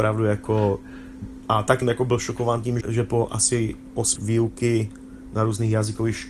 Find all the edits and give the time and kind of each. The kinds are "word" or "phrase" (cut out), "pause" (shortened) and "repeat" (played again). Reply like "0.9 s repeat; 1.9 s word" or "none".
1.8 s word; 2.8 s word; 4.2 s word